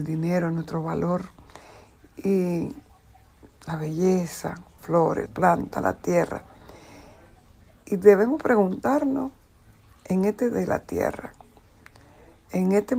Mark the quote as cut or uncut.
cut